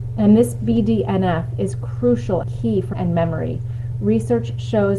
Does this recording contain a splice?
yes; 2 cuts; at 2.4 s, 2.9 s

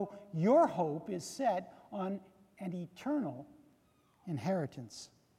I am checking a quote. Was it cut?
no; 0 cuts

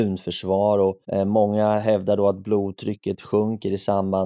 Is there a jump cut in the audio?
yes; 1 cut; at 1.0 s

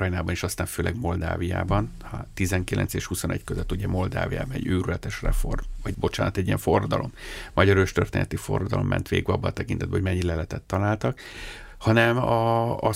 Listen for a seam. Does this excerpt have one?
yes; 1 cut; at 5.9 s

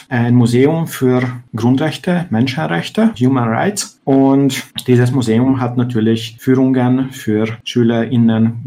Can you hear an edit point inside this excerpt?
yes; 1 cut; at 3.1 s

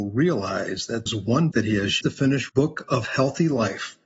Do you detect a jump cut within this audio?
yes; 4 cuts; at 1.1 s, 1.5 s, 2.0 s, 2.5 s

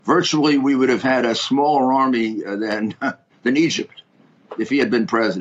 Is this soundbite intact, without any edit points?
yes; 0 cuts

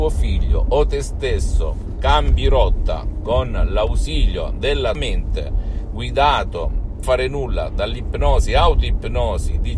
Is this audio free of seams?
no; 2 cuts; at 4.9 s, 7.0 s

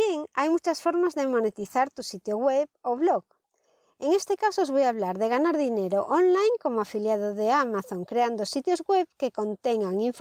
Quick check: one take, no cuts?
yes; 0 cuts

